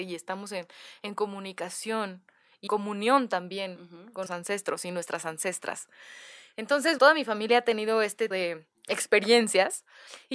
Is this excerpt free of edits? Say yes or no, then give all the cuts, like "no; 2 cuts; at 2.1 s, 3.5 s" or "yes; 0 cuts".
no; 4 cuts; at 2.7 s, 4.3 s, 7.0 s, 8.3 s